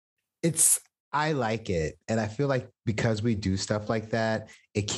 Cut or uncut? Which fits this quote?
uncut